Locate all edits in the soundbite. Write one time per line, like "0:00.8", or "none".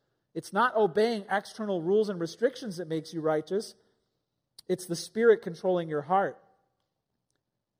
none